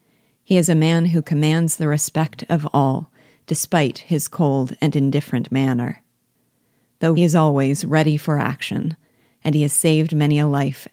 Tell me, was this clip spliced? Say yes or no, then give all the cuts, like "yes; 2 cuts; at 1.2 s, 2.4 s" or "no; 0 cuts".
yes; 1 cut; at 7.2 s